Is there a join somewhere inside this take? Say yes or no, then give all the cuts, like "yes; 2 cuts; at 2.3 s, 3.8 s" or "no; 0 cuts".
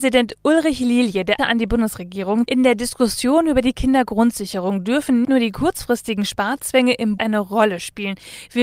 yes; 4 cuts; at 1.4 s, 2.5 s, 5.2 s, 7.2 s